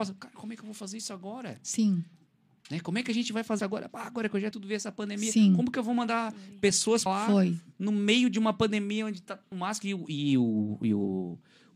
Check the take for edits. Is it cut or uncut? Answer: cut